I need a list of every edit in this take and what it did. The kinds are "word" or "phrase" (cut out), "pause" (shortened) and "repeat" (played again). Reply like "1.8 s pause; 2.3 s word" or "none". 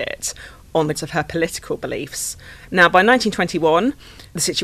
0.9 s word